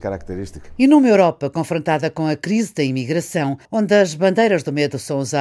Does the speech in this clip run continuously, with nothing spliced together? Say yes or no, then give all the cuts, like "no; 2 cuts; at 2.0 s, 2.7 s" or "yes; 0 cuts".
no; 1 cut; at 3.6 s